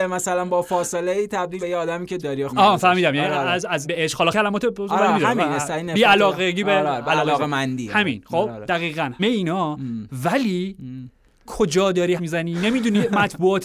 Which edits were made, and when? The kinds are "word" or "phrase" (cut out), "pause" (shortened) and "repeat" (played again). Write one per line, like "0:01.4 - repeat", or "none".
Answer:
0:01.6 - word
0:02.2 - word
0:02.5 - word
0:03.8 - word
0:04.3 - word
0:09.2 - word
0:11.5 - word
0:12.2 - word